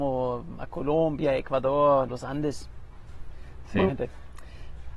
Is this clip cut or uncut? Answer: cut